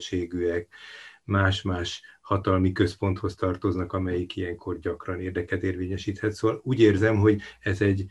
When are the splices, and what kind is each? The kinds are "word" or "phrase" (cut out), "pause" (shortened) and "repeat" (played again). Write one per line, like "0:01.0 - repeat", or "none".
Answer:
none